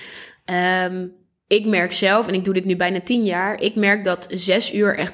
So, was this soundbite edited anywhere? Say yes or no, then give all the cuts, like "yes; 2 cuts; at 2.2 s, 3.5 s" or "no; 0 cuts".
no; 0 cuts